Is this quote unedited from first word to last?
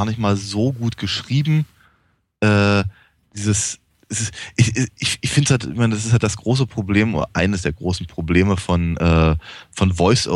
yes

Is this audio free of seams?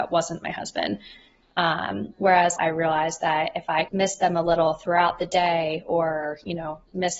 no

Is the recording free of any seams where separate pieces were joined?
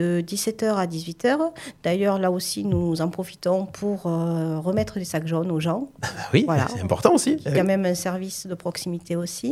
yes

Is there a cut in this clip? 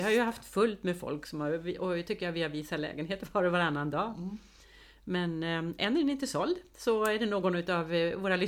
no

